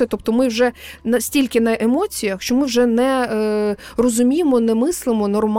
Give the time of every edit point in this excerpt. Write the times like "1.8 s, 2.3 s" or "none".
none

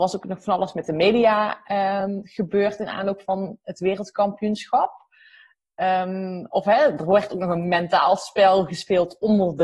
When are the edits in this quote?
none

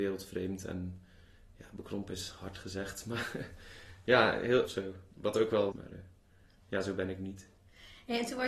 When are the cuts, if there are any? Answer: 4.6 s, 5.1 s, 5.7 s

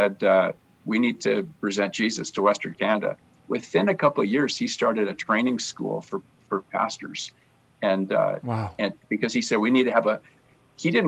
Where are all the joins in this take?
none

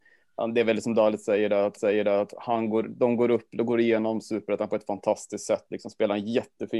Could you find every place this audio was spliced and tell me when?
1.8 s

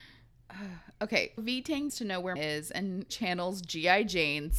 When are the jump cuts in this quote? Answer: 1.4 s, 1.9 s, 2.4 s, 3.1 s

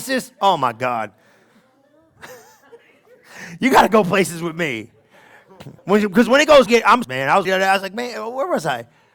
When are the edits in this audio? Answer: 5.8 s, 6.7 s, 7.0 s, 7.5 s

